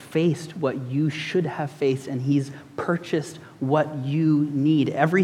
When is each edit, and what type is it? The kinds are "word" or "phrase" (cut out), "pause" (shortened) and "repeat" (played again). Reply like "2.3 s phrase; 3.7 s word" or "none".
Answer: none